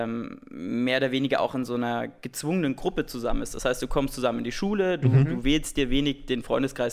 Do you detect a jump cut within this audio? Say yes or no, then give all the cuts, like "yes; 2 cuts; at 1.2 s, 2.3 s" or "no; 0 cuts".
no; 0 cuts